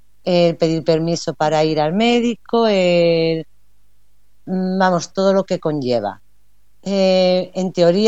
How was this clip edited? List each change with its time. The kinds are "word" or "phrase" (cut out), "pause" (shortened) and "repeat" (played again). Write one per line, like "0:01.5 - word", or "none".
0:05.1 - word

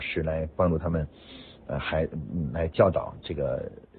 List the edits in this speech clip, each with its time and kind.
none

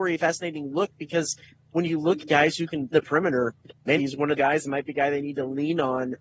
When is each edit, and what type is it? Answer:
0:02.2 - word
0:02.9 - word
0:04.0 - word
0:04.4 - word

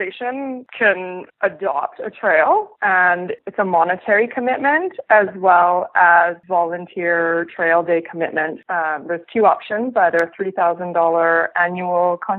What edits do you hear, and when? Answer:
0:02.7 - pause

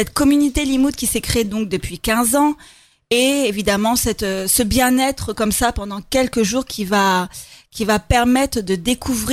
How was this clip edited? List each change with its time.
none

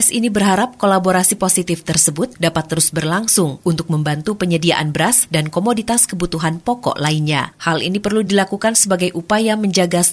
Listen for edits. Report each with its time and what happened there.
none

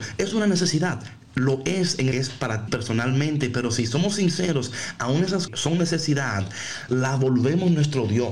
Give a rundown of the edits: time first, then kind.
0:02.1 - phrase
0:02.7 - word
0:05.5 - phrase
0:06.9 - word

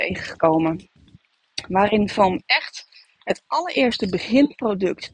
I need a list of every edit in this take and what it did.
none

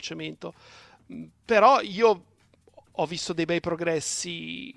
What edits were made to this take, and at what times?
none

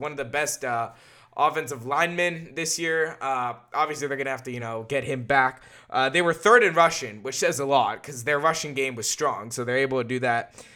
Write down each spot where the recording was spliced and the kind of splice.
none

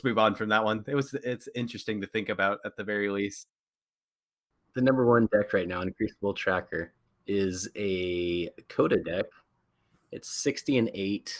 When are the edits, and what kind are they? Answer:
none

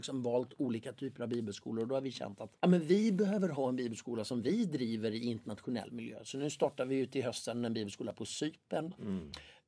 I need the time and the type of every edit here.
0:02.6 - pause

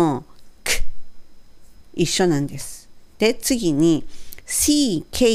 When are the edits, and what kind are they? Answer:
none

